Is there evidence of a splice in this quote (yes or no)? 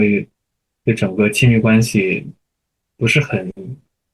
no